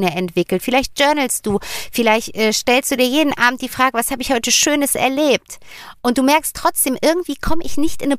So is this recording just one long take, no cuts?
yes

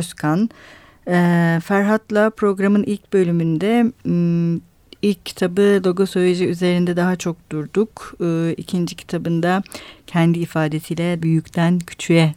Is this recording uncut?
no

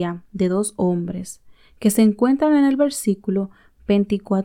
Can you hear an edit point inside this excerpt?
no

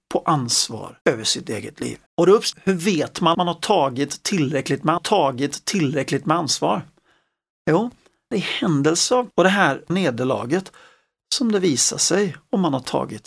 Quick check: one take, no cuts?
no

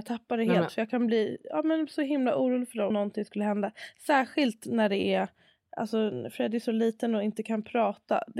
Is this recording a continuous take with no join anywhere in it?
no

